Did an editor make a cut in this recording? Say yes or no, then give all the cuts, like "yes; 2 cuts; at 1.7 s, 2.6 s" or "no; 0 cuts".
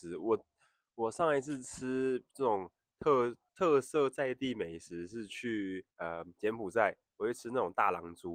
yes; 2 cuts; at 3.5 s, 5.9 s